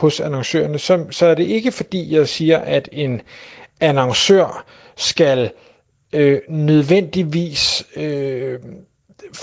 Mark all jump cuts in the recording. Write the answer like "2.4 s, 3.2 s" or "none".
none